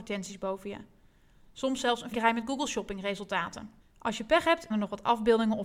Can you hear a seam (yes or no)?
yes